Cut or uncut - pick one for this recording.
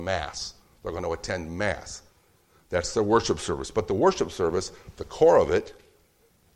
uncut